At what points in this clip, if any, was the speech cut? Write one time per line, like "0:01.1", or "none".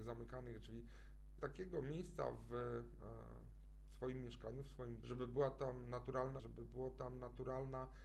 0:01.4
0:05.0
0:06.4